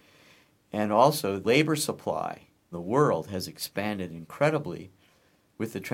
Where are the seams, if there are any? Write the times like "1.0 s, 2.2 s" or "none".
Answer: 1.4 s, 2.7 s